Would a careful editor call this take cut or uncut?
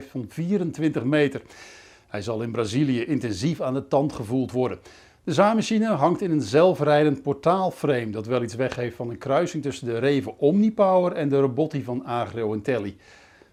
uncut